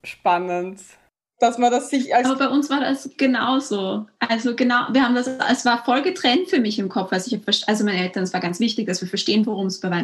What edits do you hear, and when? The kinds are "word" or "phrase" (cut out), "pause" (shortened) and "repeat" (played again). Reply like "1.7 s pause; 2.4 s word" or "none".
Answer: none